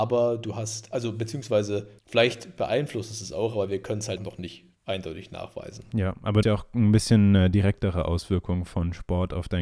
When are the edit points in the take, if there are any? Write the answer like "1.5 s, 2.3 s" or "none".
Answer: 2.0 s, 4.2 s, 4.8 s, 6.4 s